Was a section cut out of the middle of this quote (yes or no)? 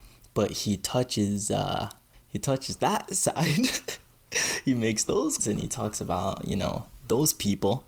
yes